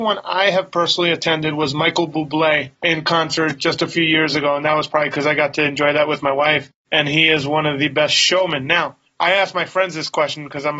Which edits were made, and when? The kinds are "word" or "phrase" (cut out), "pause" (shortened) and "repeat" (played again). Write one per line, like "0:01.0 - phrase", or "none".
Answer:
0:02.7 - pause